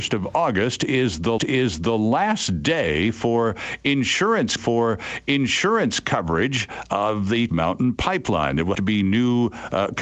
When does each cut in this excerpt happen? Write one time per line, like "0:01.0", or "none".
0:01.4
0:04.6
0:07.5
0:08.7